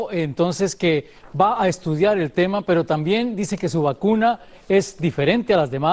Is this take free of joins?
yes; 0 cuts

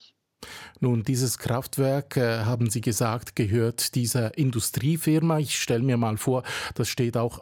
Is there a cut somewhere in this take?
no; 0 cuts

